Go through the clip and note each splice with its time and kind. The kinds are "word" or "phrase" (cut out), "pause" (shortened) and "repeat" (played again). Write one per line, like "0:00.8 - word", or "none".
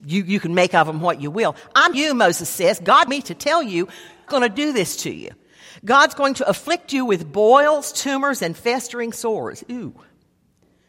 0:01.9 - word
0:03.1 - word
0:04.3 - word